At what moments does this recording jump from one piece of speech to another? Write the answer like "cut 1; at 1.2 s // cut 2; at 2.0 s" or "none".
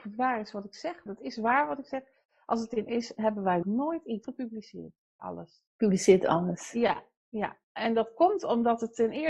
cut 1; at 1.1 s // cut 2; at 2.9 s // cut 3; at 3.6 s // cut 4; at 4.2 s // cut 5; at 5.2 s